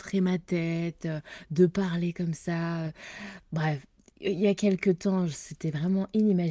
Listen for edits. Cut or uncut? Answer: uncut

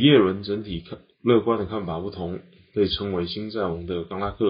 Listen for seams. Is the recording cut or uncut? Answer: uncut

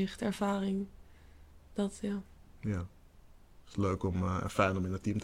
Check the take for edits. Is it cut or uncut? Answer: uncut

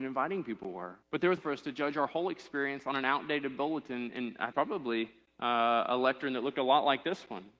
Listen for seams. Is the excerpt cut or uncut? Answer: cut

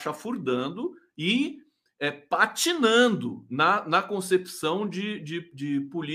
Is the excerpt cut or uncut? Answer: uncut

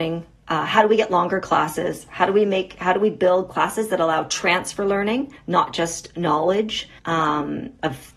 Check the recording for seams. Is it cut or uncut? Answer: cut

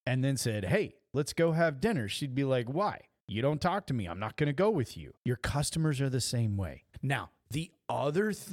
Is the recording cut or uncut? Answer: cut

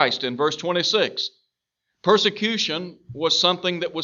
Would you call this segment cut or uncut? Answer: uncut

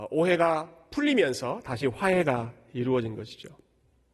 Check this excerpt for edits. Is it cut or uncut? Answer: uncut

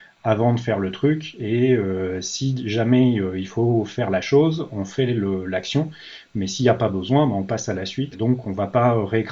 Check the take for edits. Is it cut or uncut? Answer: cut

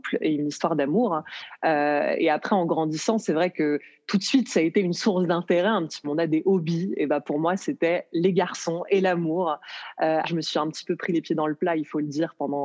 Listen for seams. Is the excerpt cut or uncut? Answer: cut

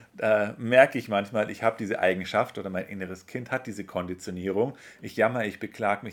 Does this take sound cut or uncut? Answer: uncut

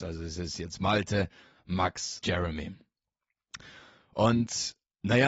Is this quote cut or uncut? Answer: cut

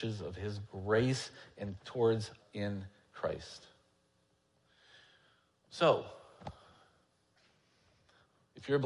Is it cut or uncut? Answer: cut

